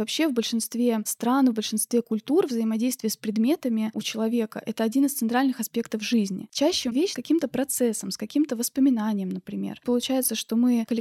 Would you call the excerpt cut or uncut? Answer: cut